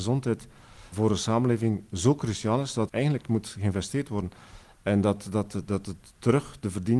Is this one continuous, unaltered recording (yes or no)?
no